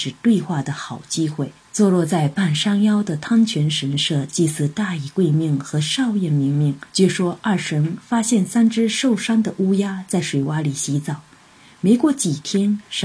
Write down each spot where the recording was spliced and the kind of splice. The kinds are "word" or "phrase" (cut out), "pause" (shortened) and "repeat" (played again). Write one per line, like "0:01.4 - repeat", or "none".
0:01.6 - pause
0:06.9 - pause